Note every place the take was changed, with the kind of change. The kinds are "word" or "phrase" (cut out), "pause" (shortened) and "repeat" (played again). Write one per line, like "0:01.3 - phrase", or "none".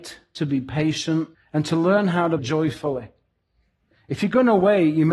0:01.3 - pause
0:02.4 - word